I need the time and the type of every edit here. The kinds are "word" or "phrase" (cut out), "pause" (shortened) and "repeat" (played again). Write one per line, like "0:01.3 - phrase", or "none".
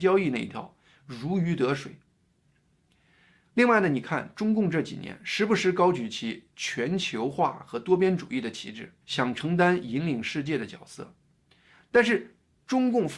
0:09.0 - pause